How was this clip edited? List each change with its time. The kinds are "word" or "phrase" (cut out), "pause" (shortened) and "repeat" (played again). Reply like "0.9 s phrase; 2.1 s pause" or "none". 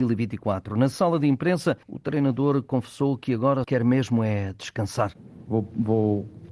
1.8 s pause; 3.6 s word